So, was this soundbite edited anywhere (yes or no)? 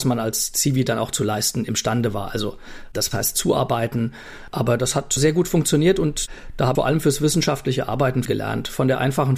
yes